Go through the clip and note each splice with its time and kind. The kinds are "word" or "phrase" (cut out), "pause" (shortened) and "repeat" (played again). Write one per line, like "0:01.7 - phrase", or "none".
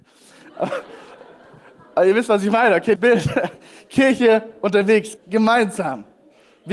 0:03.0 - word
0:05.2 - word

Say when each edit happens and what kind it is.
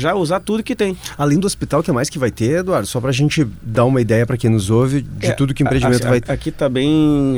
0:06.3 - word

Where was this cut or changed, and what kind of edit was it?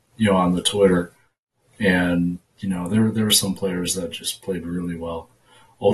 0:02.5 - pause

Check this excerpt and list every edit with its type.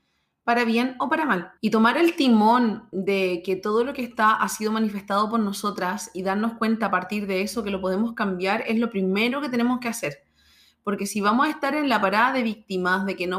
0:01.6 - pause

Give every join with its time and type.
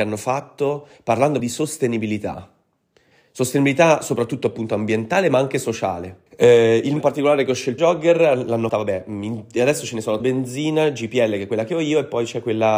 0:01.4 - word
0:06.3 - pause
0:07.0 - word
0:07.8 - phrase
0:08.7 - word
0:10.2 - phrase

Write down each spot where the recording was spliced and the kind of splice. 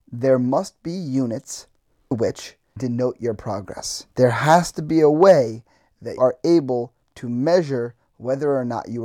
0:02.1 - word
0:02.8 - phrase
0:04.1 - pause
0:06.2 - word

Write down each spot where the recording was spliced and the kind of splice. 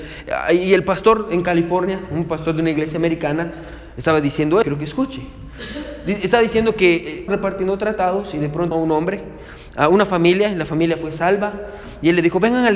0:04.6 - word
0:07.3 - word
0:08.7 - word

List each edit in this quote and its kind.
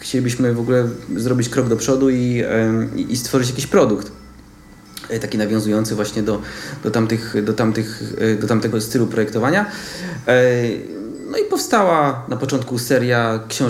0:08.7 - word

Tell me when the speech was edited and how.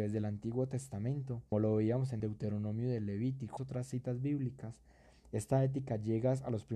0:01.5 - word
0:02.2 - phrase
0:03.6 - phrase

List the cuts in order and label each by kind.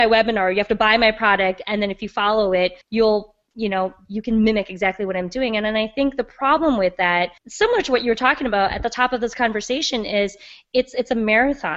0:02.8 - pause
0:07.4 - pause

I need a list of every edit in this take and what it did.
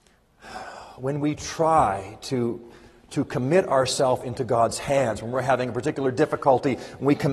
none

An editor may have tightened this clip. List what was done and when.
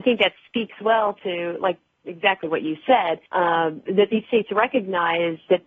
0:03.3 - pause

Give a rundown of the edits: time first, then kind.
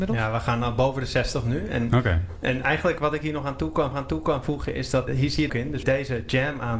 0:03.9 - repeat
0:05.1 - word
0:05.5 - phrase
0:05.8 - phrase

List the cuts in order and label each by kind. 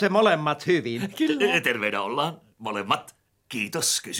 none

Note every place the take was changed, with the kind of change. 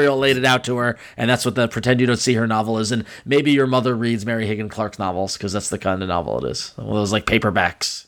none

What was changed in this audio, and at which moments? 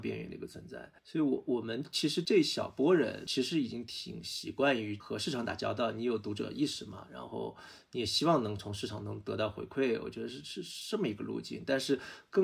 0:01.0 - pause

